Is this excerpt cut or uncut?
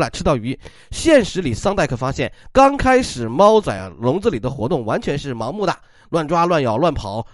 uncut